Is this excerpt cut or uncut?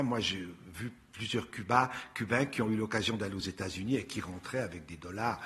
uncut